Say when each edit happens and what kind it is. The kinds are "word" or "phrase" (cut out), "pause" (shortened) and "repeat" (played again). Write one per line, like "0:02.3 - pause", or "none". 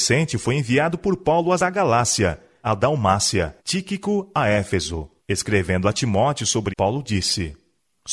0:01.6 - word
0:02.6 - word
0:03.6 - pause
0:05.2 - pause
0:06.7 - phrase